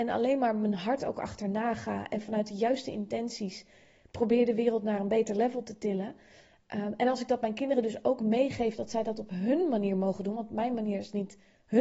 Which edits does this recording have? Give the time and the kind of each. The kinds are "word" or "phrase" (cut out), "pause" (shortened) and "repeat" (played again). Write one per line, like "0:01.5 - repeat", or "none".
none